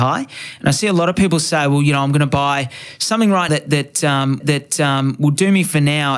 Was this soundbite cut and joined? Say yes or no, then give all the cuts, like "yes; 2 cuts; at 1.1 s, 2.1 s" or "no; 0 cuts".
yes; 2 cuts; at 3.5 s, 4.4 s